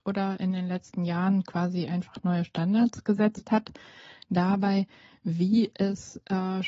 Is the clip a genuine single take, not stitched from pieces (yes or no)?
yes